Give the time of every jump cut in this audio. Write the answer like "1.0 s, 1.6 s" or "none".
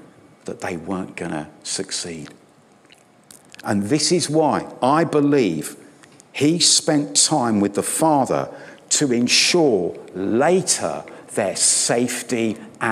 none

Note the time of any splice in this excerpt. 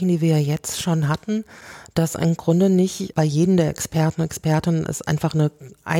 3.1 s

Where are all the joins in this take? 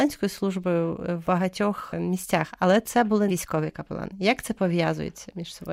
1.2 s, 3.3 s

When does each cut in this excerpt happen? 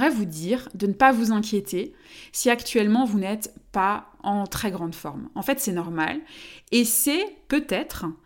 none

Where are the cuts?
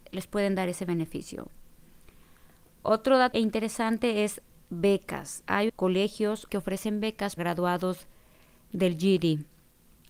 3.3 s, 5.7 s, 6.5 s, 7.4 s

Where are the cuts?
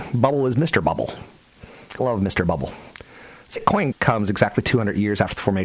2.0 s, 3.6 s, 3.9 s

